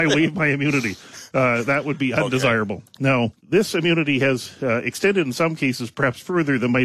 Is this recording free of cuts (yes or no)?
no